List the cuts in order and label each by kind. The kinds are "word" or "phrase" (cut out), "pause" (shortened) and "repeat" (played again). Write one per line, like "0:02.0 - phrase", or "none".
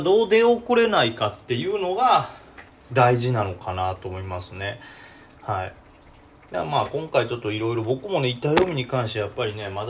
none